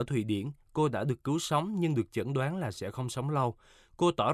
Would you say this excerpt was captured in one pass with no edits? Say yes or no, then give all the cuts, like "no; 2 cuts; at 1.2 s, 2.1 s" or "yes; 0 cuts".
yes; 0 cuts